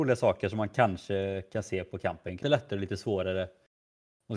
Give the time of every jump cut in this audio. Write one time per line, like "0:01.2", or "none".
0:02.4